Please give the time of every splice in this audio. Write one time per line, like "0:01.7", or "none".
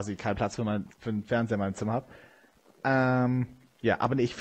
0:00.9